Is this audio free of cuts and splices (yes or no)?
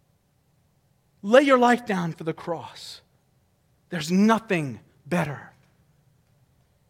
yes